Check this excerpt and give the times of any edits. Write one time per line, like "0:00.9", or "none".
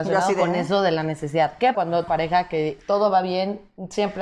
0:01.7
0:02.1

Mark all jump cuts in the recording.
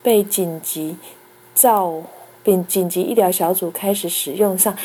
0:02.3

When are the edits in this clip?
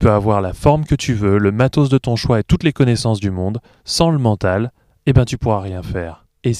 none

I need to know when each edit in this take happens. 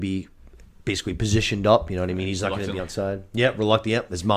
0:02.8

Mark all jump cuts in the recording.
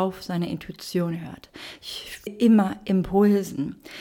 0:02.3

